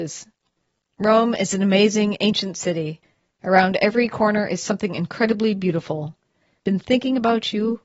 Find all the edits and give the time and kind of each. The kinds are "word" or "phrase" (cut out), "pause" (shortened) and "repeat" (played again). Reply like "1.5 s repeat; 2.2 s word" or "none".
none